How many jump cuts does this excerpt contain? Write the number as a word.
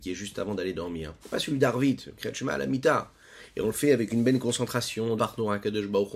two